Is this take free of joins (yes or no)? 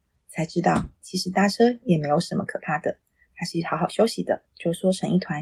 no